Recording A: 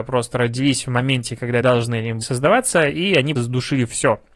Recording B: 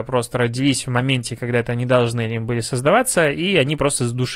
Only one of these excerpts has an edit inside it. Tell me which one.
A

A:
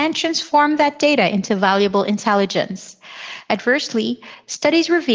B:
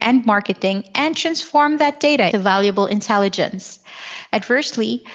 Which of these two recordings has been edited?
B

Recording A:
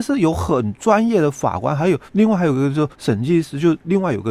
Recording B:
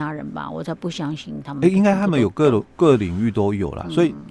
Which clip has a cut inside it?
A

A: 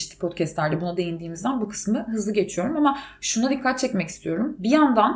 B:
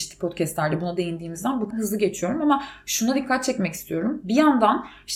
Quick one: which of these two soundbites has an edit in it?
B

